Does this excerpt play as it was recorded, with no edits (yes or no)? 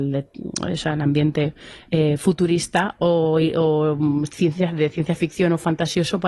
yes